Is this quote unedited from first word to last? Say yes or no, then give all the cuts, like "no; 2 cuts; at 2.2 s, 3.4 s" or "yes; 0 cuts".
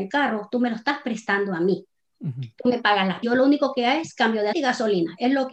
no; 2 cuts; at 3.2 s, 4.5 s